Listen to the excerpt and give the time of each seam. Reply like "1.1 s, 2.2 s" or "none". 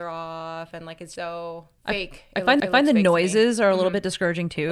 1.2 s, 1.8 s, 2.6 s